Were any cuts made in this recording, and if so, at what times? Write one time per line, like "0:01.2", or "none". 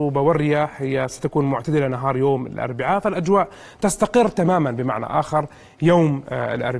none